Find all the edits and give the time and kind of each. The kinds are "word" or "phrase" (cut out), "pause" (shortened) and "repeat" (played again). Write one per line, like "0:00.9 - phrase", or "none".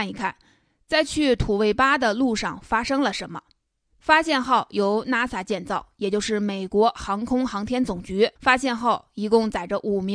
0:03.7 - pause
0:08.4 - pause

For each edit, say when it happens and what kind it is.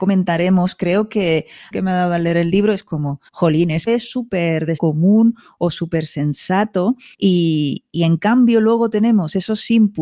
0:01.7 - phrase
0:03.3 - pause
0:03.9 - phrase
0:04.8 - word
0:07.1 - pause

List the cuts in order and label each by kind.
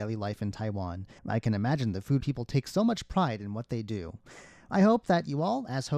0:01.2 - pause
0:02.2 - phrase

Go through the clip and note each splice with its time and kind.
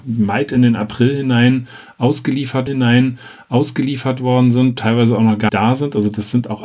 0:02.7 - repeat
0:05.5 - word

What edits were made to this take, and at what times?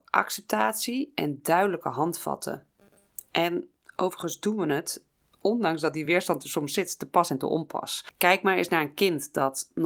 none

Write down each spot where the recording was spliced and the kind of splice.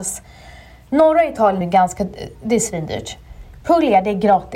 0:01.6 - word

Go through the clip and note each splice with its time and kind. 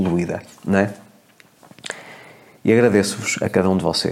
none

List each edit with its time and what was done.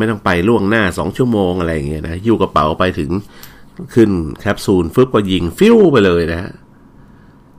none

